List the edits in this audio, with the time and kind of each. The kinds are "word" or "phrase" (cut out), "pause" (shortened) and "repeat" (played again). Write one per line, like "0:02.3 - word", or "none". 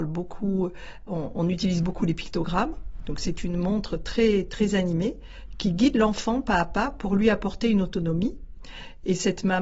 none